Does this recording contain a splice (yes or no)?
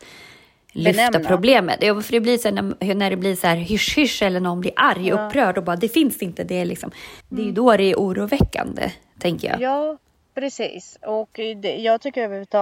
yes